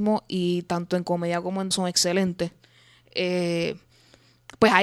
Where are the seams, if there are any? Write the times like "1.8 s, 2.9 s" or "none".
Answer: 1.7 s